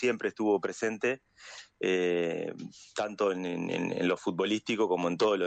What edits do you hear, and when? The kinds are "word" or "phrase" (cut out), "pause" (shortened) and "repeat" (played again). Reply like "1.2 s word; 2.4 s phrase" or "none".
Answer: none